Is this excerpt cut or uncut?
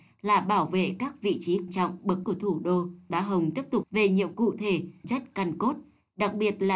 cut